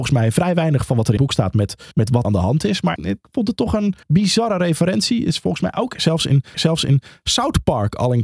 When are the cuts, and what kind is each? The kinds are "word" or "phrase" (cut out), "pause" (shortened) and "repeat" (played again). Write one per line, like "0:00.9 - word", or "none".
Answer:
0:01.2 - word
0:01.9 - pause
0:02.2 - phrase
0:03.0 - word
0:04.0 - pause
0:06.5 - repeat